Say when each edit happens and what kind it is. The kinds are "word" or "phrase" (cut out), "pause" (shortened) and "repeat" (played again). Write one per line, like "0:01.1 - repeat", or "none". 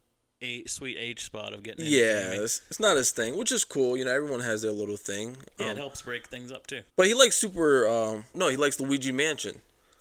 0:06.9 - pause
0:08.3 - word